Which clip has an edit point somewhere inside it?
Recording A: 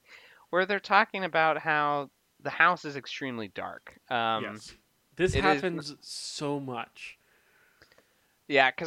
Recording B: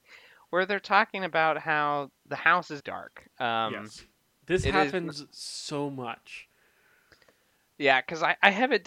B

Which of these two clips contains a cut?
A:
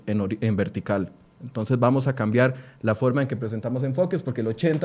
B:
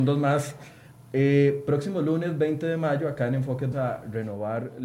B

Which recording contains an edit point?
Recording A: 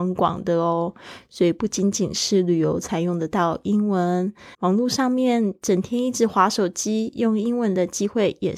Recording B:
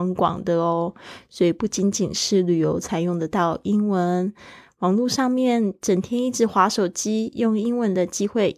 A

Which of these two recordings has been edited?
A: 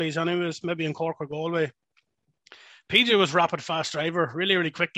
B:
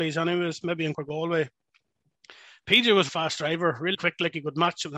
B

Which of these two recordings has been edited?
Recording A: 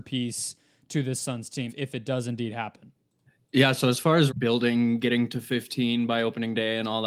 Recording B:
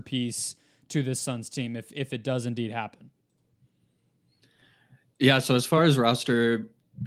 A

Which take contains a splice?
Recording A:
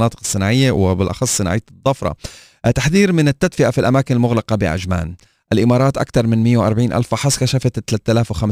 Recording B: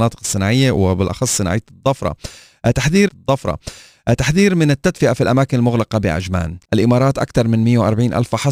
B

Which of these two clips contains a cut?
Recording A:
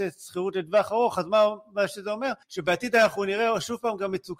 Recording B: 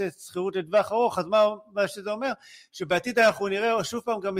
A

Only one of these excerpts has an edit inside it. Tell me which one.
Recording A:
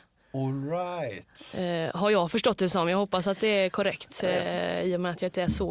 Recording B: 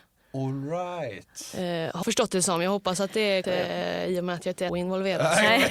B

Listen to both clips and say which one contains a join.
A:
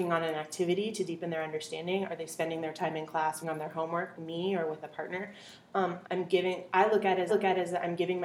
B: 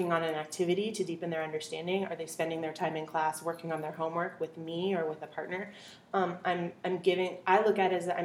A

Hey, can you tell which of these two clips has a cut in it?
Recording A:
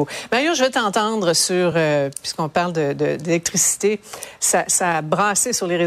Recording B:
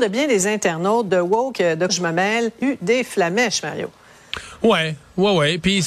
B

